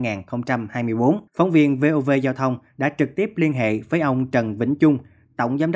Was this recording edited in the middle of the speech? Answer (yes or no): yes